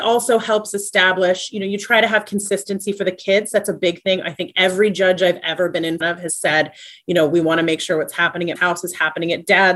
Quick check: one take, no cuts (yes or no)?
no